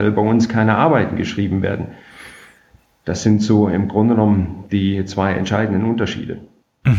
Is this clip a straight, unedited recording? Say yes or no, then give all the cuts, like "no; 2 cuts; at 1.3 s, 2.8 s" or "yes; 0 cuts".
yes; 0 cuts